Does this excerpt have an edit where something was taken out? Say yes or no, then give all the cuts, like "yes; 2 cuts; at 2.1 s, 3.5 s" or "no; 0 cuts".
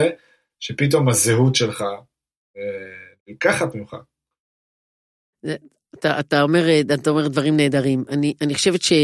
no; 0 cuts